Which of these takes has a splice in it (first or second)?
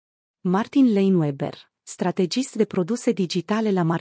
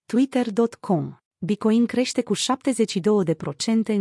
second